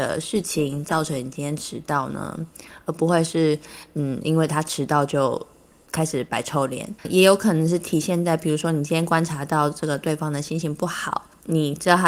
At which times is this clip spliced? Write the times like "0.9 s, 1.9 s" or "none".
7.0 s